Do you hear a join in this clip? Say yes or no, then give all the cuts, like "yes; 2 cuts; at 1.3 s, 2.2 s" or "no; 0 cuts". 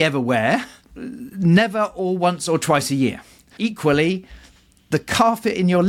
yes; 1 cut; at 3.6 s